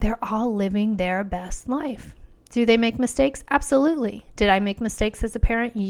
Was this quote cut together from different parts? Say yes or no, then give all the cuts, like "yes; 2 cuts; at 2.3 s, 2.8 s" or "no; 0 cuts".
no; 0 cuts